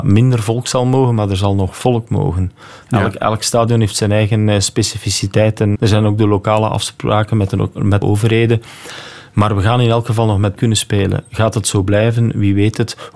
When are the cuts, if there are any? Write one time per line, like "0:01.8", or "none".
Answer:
0:05.7
0:08.0
0:10.6